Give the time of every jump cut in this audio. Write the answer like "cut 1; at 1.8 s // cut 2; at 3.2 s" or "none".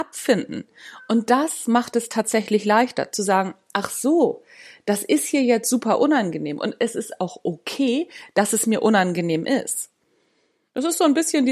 none